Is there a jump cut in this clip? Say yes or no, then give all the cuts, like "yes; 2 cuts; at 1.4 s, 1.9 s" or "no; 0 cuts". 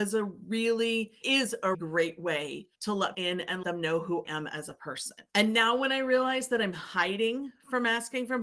yes; 7 cuts; at 1.2 s, 1.7 s, 2.7 s, 3.1 s, 3.6 s, 4.2 s, 5.3 s